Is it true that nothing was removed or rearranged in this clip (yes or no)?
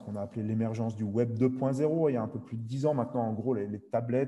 yes